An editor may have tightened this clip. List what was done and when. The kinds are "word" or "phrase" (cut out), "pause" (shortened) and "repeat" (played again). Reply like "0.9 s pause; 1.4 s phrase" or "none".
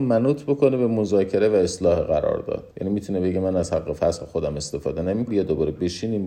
2.7 s pause; 5.3 s word